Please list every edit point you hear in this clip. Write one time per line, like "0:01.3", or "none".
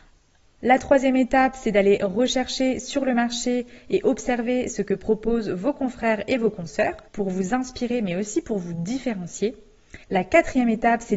0:07.1
0:10.0